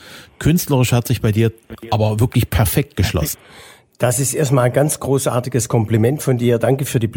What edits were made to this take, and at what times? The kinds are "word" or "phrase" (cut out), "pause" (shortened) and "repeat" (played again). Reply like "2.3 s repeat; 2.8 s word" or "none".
none